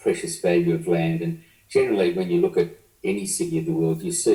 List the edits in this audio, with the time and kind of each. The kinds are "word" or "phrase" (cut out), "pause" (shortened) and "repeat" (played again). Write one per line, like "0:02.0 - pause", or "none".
none